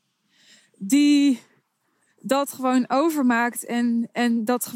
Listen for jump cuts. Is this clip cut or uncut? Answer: uncut